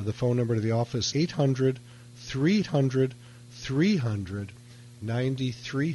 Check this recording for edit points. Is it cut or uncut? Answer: cut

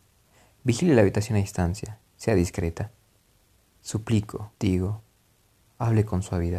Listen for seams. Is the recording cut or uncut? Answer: cut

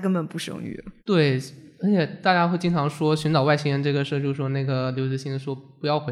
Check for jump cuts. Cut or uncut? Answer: cut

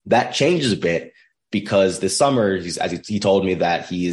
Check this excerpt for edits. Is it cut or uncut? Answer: uncut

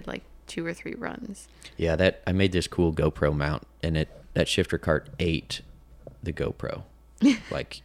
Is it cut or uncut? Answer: cut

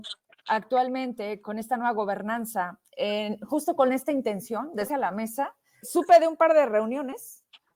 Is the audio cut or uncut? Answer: cut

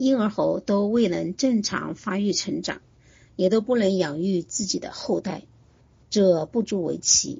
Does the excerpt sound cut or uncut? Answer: uncut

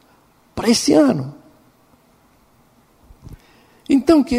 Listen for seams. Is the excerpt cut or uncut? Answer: uncut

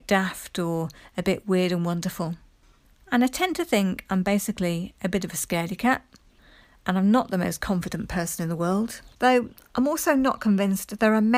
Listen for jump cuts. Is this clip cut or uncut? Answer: cut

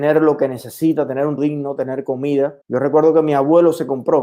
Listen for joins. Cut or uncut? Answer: cut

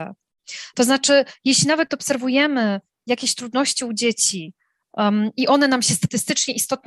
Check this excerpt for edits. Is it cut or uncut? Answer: uncut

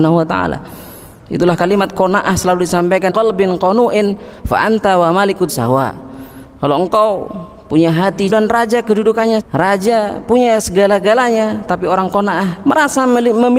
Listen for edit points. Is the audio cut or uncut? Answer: cut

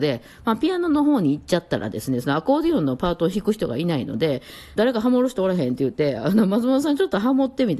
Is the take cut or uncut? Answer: cut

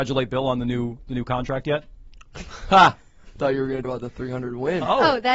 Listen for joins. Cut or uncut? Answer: cut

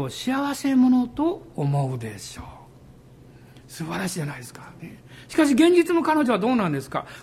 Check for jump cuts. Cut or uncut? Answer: cut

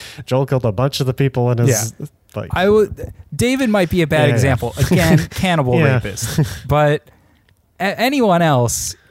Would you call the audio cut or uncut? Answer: uncut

